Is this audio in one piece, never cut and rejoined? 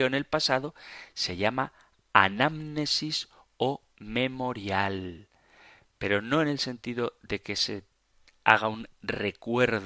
yes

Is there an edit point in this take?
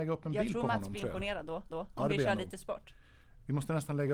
yes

